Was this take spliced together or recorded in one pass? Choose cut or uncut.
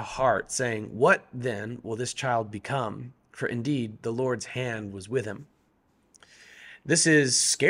uncut